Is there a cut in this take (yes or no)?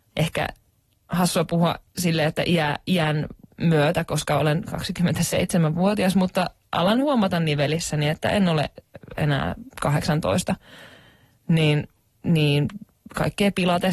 no